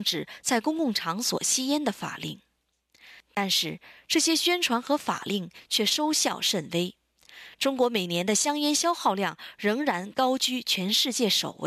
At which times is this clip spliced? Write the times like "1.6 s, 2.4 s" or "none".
none